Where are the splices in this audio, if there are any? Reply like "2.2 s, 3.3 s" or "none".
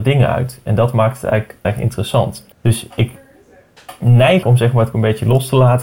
1.6 s, 2.5 s, 4.4 s, 4.9 s